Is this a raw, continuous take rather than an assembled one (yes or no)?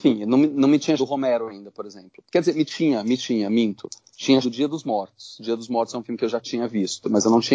no